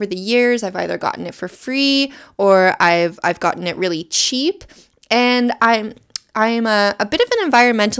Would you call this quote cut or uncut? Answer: uncut